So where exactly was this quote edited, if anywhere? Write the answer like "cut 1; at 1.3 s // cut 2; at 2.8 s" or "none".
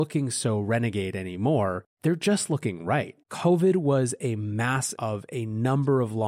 cut 1; at 1.9 s // cut 2; at 3.2 s // cut 3; at 4.9 s